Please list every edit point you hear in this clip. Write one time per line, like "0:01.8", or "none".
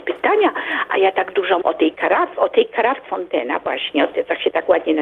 0:01.6
0:03.1